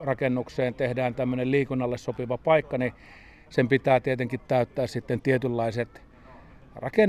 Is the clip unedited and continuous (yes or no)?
yes